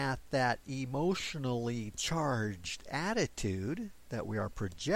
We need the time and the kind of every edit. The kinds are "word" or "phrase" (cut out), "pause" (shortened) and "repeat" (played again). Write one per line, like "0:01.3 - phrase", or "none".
none

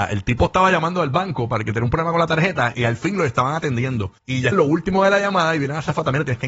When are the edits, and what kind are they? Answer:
0:02.7 - word
0:04.2 - pause
0:04.5 - word

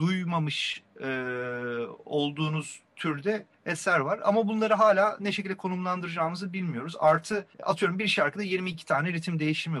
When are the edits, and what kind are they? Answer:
0:03.5 - pause
0:07.5 - pause

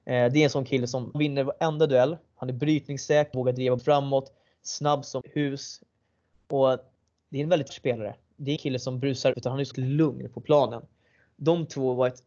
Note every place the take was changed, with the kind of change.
0:01.1 - word
0:03.3 - word
0:03.8 - word
0:05.2 - word
0:07.7 - word
0:08.6 - word
0:09.3 - word
0:09.7 - word

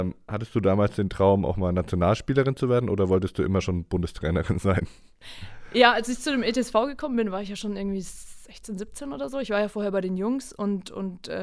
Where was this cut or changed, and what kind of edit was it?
none

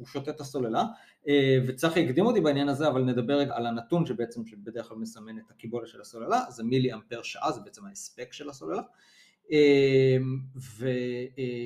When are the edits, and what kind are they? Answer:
0:03.5 - word

